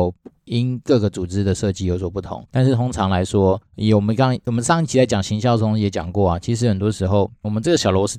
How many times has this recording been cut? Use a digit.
2